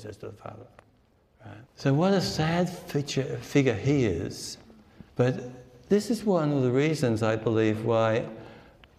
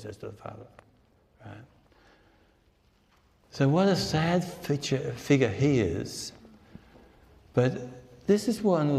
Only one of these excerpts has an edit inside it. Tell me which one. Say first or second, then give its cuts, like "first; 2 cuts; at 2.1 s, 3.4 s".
first; 2 cuts; at 1.7 s, 5.1 s